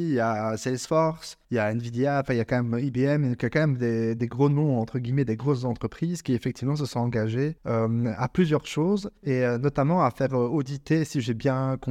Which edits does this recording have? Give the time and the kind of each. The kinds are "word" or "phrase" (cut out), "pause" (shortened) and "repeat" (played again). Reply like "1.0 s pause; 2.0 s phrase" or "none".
1.4 s pause; 7.6 s pause; 9.2 s pause